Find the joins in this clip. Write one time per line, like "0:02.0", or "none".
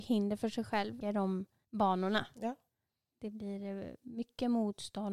0:01.0
0:01.6